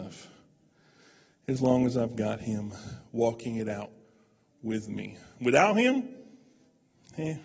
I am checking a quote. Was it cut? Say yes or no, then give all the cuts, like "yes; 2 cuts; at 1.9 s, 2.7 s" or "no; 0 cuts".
no; 0 cuts